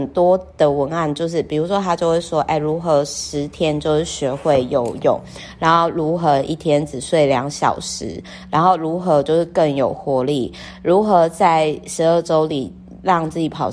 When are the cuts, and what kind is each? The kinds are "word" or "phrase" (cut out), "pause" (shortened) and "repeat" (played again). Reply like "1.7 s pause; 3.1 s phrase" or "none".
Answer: none